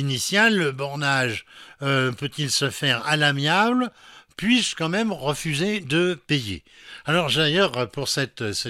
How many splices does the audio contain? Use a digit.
0